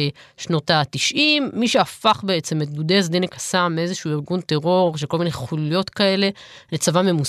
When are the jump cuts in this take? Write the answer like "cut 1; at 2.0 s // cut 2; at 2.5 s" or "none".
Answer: none